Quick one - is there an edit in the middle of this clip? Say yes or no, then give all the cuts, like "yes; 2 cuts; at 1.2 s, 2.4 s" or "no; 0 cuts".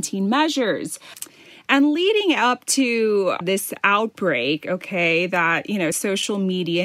yes; 2 cuts; at 3.4 s, 5.9 s